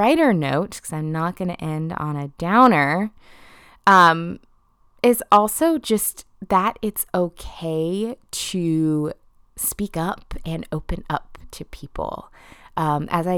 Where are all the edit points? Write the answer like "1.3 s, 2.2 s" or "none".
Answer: none